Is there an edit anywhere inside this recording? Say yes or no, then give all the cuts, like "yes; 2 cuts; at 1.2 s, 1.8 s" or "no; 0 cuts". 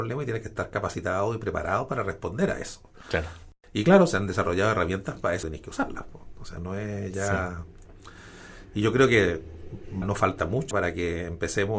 yes; 4 cuts; at 5.4 s, 6.6 s, 10.0 s, 10.7 s